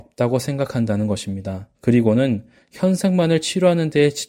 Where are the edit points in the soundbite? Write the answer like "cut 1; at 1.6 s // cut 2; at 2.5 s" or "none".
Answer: cut 1; at 1.7 s